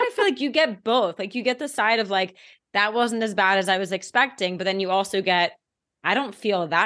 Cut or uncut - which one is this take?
uncut